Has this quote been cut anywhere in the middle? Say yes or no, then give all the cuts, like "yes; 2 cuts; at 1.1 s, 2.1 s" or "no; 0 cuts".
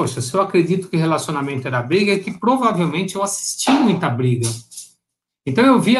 no; 0 cuts